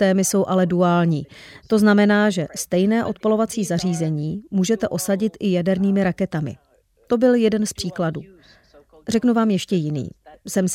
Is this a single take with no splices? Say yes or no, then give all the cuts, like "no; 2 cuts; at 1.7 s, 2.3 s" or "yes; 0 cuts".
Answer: yes; 0 cuts